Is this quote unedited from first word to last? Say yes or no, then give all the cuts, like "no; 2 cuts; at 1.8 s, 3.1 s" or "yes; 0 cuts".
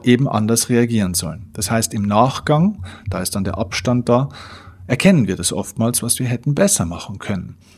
yes; 0 cuts